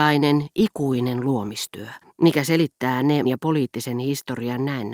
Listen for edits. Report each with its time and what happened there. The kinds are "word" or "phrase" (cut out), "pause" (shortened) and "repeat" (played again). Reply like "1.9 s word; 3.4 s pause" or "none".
2.0 s pause; 3.2 s word